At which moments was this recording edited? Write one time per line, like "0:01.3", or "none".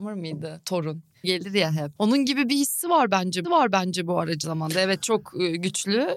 0:01.2
0:02.0
0:03.4
0:04.4